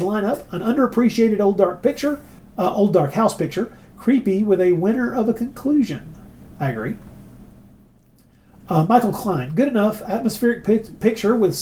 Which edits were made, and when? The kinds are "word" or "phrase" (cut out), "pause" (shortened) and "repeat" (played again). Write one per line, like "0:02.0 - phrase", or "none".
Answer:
0:02.4 - pause